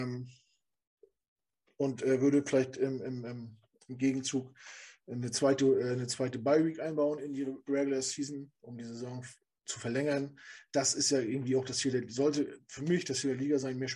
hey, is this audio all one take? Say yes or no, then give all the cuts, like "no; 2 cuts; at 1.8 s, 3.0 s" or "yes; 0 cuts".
yes; 0 cuts